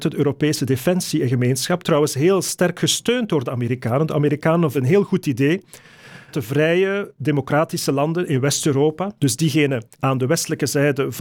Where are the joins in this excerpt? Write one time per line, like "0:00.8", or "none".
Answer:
0:04.7
0:06.3
0:09.2
0:09.9